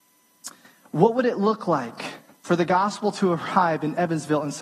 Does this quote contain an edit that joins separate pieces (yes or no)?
no